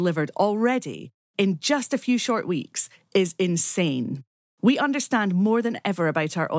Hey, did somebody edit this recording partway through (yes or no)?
no